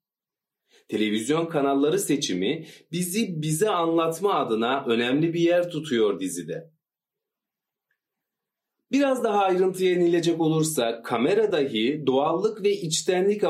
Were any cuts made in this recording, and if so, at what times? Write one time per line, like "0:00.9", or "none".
none